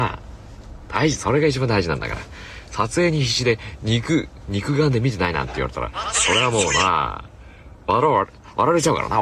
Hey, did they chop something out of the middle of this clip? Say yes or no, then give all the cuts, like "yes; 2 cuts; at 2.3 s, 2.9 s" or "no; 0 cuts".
yes; 1 cut; at 4.4 s